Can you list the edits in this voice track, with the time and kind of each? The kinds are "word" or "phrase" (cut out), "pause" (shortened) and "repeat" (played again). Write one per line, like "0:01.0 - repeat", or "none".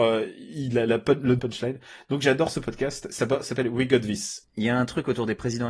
0:01.4 - phrase